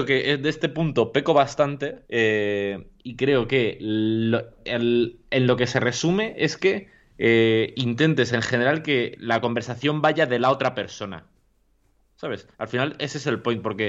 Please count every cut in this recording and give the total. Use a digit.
2